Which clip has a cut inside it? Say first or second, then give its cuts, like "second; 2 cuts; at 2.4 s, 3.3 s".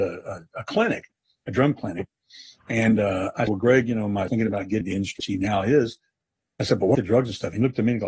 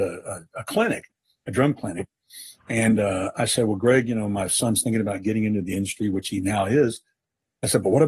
first; 5 cuts; at 3.5 s, 4.3 s, 4.8 s, 5.2 s, 6.9 s